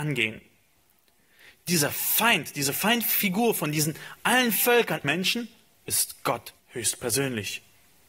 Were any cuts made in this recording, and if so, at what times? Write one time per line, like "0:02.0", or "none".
0:05.0
0:06.6